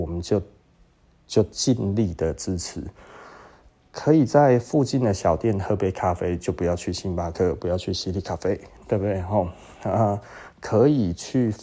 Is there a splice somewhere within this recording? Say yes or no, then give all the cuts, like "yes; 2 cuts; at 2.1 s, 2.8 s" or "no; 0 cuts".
no; 0 cuts